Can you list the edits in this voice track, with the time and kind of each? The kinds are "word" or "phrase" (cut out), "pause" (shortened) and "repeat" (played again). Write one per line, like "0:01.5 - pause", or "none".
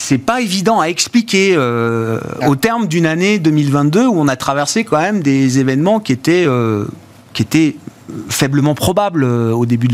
none